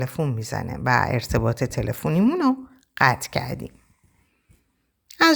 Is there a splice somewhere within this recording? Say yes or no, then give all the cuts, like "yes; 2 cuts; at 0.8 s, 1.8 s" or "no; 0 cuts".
no; 0 cuts